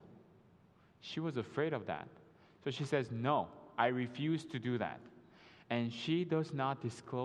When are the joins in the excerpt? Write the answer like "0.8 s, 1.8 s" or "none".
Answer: none